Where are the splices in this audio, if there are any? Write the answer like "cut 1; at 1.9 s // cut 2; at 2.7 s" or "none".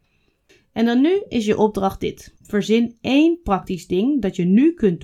none

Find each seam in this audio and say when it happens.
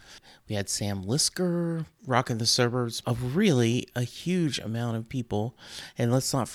cut 1; at 2.0 s // cut 2; at 3.0 s

